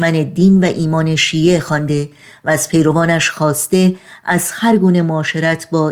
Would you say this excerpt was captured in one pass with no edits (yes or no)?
yes